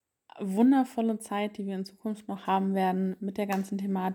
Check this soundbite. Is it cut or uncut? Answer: uncut